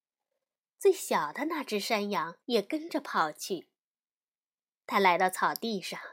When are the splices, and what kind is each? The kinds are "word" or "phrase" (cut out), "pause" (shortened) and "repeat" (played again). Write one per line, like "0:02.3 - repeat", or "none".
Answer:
0:02.4 - pause